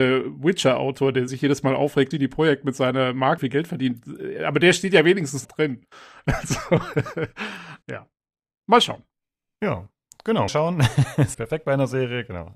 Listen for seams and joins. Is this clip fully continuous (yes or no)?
no